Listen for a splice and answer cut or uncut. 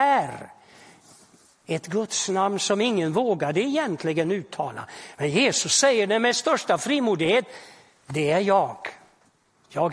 uncut